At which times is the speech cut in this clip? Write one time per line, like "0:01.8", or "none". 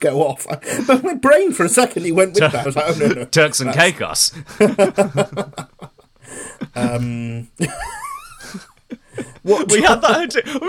0:02.0
0:02.6

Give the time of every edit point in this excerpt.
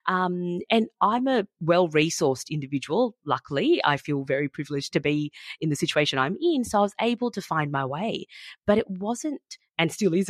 none

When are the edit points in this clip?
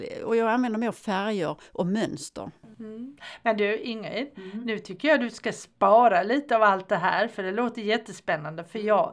none

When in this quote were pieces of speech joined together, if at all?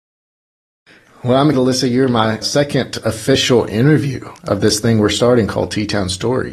0:01.5
0:02.4
0:04.4

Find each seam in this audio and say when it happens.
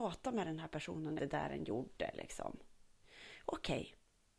0:01.2

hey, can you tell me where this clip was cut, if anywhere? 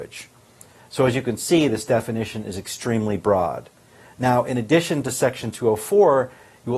none

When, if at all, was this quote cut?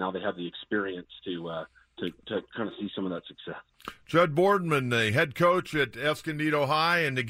none

